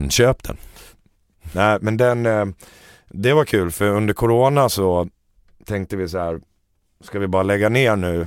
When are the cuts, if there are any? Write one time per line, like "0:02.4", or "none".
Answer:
none

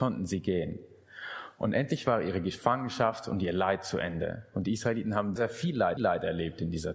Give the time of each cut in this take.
0:05.4
0:06.0

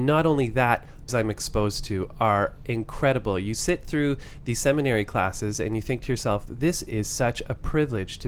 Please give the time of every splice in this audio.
0:01.1

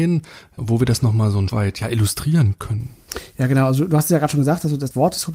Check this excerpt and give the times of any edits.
0:01.5

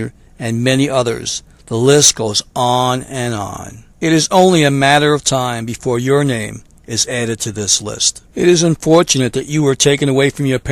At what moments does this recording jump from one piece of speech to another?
0:03.9
0:08.3

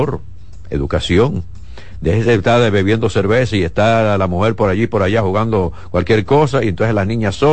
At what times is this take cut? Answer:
none

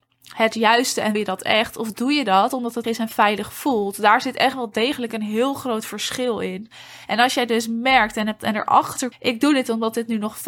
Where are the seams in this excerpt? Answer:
0:01.1
0:02.8
0:08.4
0:09.1

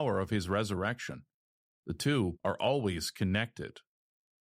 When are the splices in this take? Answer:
none

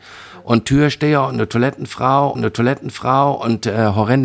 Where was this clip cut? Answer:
0:02.3

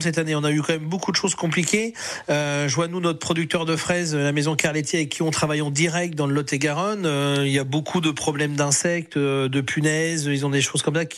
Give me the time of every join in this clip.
none

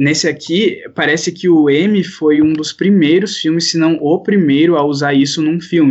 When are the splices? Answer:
none

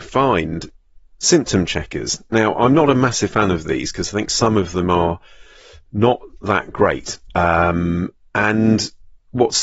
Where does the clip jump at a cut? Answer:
none

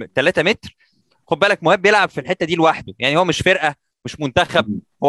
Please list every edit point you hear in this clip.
none

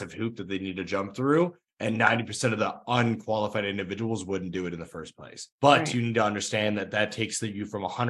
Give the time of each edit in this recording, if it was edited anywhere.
0:05.5

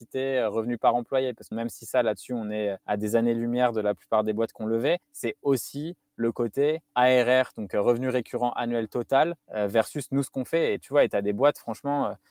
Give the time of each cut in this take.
0:01.5
0:02.8
0:05.0
0:06.9
0:09.4
0:10.8

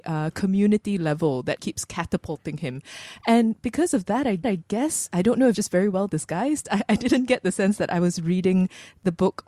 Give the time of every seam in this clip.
0:01.6
0:04.4
0:05.5

